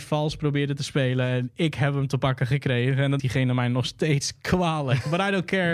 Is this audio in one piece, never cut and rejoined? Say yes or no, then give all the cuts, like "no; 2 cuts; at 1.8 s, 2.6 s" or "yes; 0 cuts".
no; 1 cut; at 3.2 s